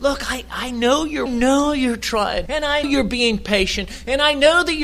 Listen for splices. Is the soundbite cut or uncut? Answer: cut